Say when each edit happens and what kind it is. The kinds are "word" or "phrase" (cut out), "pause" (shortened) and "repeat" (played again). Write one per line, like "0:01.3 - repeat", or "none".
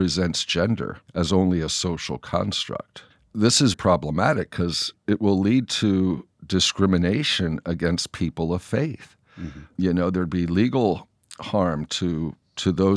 0:01.1 - pause
0:03.1 - pause
0:03.7 - word
0:04.9 - word